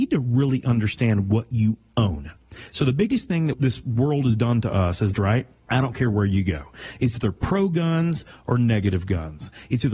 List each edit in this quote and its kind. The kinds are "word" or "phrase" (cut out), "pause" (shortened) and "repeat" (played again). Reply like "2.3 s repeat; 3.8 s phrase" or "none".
5.1 s phrase